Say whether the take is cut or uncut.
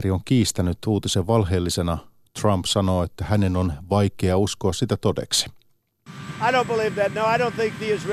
uncut